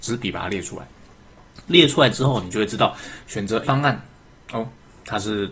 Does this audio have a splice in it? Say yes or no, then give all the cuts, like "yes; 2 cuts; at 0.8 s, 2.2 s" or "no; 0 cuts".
yes; 1 cut; at 3.6 s